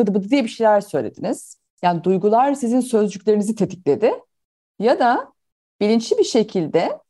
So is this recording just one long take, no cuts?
yes; 0 cuts

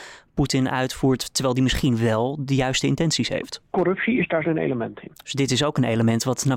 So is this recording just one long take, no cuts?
no; 1 cut; at 4.4 s

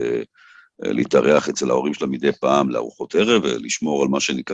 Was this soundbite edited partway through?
no; 0 cuts

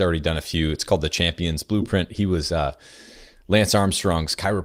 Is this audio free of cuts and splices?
yes; 0 cuts

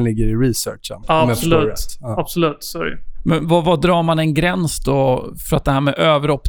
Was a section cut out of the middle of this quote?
no; 0 cuts

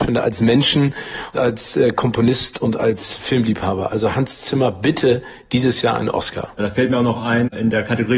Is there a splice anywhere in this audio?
yes; 1 cut; at 1.3 s

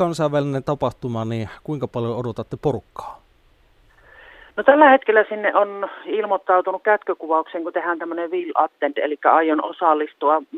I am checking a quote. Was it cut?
no; 0 cuts

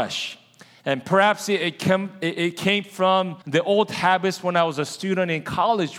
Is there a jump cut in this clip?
yes; 1 cut; at 3.4 s

